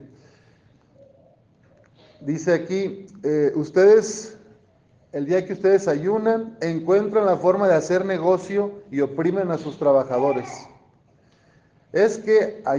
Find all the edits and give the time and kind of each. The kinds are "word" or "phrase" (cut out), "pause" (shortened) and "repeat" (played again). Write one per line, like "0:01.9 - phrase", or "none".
none